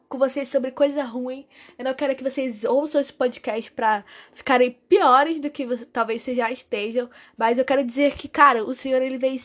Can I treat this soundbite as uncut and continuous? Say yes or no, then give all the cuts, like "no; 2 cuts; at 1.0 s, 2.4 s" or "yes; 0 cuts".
yes; 0 cuts